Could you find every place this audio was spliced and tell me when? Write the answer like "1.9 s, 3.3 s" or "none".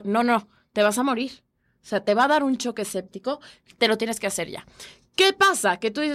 none